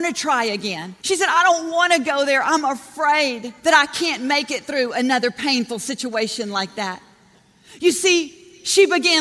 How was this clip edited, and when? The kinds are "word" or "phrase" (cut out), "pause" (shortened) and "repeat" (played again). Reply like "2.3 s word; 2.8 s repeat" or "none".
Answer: 1.0 s pause; 3.6 s pause